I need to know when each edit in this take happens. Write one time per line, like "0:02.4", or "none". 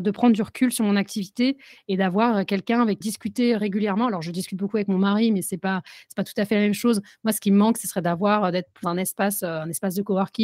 0:03.0
0:08.8